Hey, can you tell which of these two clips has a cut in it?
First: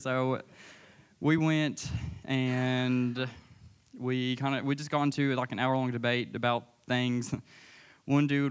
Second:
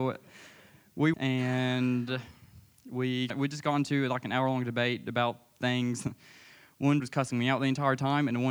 second; 3 cuts; at 1.1 s, 3.3 s, 7.0 s

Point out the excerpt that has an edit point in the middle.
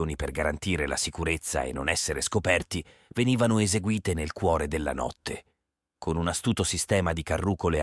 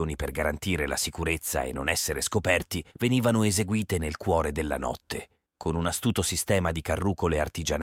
second; 2 cuts; at 2.9 s, 5.4 s

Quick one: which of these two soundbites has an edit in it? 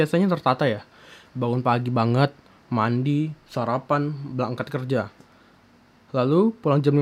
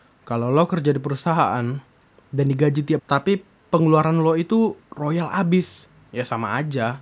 second; 1 cut; at 3.0 s

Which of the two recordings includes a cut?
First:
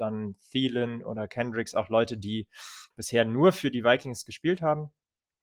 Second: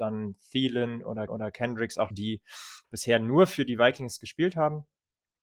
second; 2 cuts; at 1.3 s, 2.1 s

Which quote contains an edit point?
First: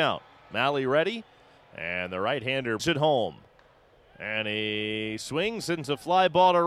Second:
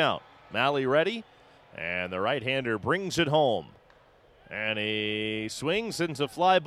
first; 1 cut; at 2.8 s

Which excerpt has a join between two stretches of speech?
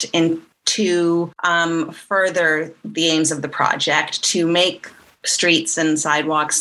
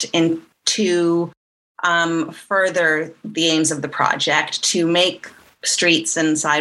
first; 1 cut; at 1.4 s

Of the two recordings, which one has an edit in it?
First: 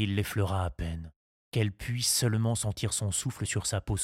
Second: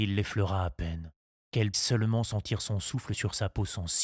second; 1 cut; at 1.7 s

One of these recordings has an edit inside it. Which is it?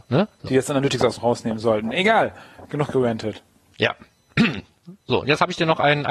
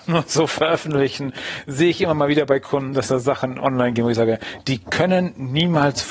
first; 2 cuts; at 1.2 s, 5.0 s

